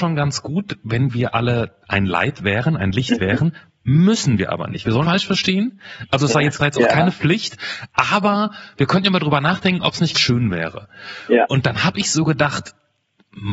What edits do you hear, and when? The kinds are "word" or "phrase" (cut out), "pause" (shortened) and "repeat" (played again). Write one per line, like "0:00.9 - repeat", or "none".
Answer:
0:01.8 - pause
0:05.0 - phrase
0:06.6 - phrase
0:10.1 - word